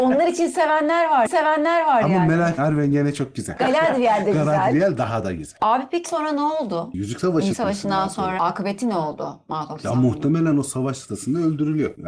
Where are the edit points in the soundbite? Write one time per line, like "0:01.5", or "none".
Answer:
0:01.3
0:02.6
0:06.0
0:07.5
0:08.4